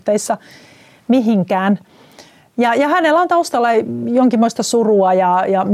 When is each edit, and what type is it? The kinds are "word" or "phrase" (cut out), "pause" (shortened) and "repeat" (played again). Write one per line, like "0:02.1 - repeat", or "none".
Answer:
none